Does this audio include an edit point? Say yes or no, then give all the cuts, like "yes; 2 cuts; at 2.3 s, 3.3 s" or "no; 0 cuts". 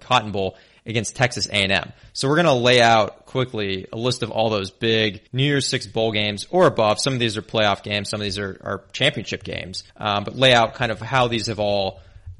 yes; 2 cuts; at 5.3 s, 9.9 s